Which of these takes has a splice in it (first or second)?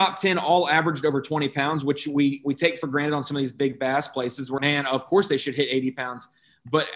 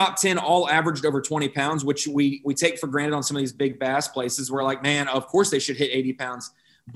first